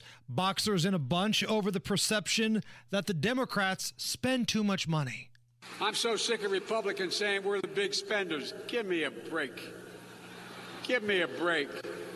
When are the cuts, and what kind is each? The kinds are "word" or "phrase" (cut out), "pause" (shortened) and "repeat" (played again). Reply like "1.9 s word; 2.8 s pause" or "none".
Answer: none